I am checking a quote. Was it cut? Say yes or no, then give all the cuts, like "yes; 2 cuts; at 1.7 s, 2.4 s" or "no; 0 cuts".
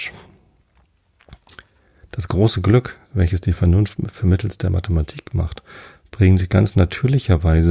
no; 0 cuts